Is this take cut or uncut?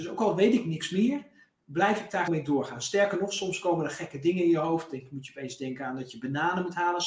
cut